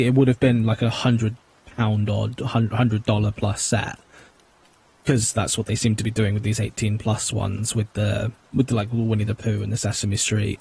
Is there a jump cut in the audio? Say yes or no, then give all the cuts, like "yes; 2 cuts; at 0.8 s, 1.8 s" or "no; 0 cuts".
no; 0 cuts